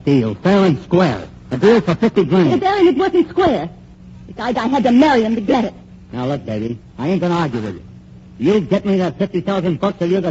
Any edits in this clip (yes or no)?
yes